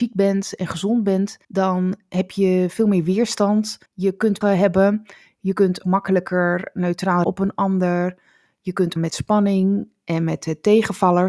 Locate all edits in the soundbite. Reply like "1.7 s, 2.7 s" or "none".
1.4 s, 3.9 s, 4.4 s, 5.8 s, 7.2 s, 9.0 s